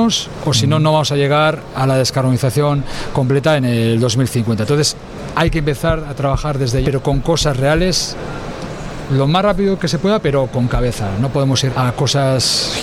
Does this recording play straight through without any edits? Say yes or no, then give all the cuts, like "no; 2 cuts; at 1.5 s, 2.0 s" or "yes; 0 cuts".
no; 2 cuts; at 6.8 s, 11.7 s